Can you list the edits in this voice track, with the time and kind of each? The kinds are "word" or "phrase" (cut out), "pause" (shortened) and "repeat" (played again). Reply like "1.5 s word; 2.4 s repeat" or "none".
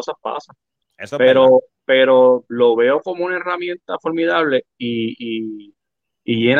1.7 s pause